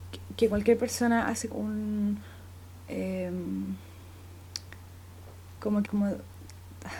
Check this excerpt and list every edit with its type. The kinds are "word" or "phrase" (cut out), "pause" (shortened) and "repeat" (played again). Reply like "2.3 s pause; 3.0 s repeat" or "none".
1.5 s word; 5.8 s word